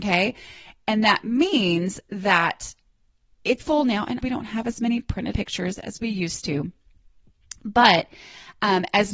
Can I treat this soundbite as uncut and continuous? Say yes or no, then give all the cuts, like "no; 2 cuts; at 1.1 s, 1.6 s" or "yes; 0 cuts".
no; 3 cuts; at 3.6 s, 4.2 s, 5.3 s